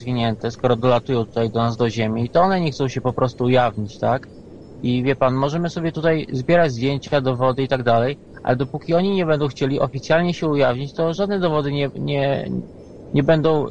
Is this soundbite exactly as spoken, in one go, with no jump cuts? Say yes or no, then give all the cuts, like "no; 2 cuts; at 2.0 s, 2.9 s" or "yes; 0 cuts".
yes; 0 cuts